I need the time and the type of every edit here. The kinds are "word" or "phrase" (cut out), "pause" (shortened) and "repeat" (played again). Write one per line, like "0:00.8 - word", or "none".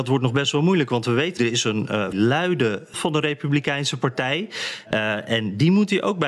0:01.4 - word
0:02.1 - word
0:02.9 - word